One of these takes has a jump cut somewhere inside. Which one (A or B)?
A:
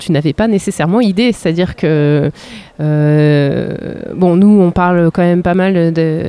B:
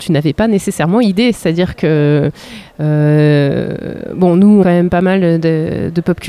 B